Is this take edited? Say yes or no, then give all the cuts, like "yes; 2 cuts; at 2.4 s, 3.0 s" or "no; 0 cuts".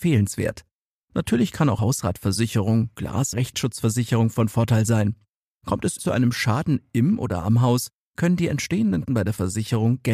yes; 4 cuts; at 1.8 s, 3.3 s, 6.0 s, 9.1 s